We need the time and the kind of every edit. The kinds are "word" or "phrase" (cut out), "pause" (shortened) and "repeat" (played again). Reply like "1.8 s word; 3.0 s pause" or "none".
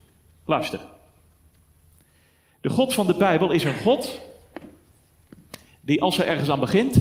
none